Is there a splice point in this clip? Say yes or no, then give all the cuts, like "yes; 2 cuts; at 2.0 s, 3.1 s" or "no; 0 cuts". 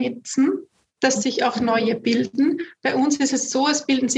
no; 0 cuts